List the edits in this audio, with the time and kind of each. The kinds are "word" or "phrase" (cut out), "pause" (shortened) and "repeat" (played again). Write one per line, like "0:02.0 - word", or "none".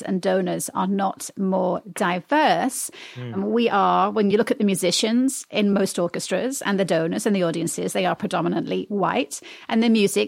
none

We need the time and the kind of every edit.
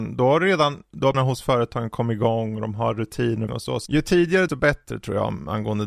0:01.1 - word
0:03.5 - phrase
0:03.9 - word
0:04.5 - word

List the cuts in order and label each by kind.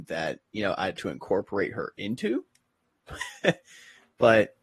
0:01.0 - word

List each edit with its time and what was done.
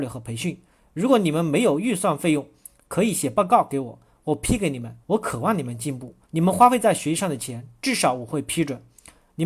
0:05.0 - pause
0:06.2 - pause

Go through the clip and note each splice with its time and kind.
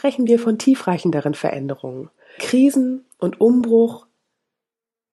0:02.4 - word

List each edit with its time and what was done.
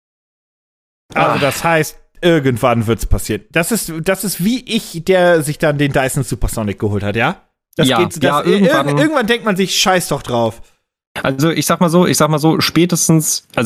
none

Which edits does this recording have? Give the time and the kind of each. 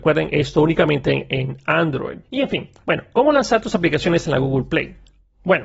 0:02.2 - pause

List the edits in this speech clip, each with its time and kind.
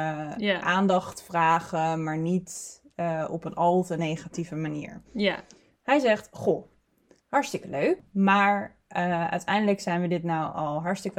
none

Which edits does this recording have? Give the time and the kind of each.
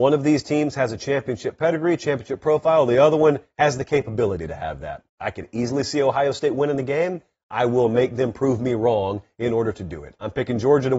0:05.1 - pause

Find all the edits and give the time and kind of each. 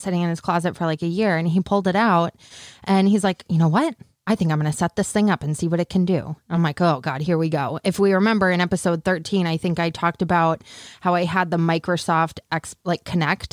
none

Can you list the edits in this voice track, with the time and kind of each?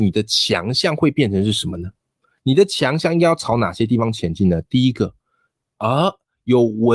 none

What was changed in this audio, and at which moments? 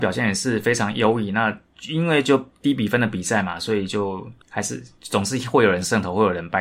0:04.4 - pause

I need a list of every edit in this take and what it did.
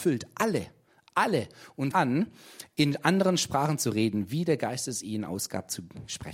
0:01.9 - word

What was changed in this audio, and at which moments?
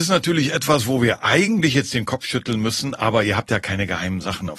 none

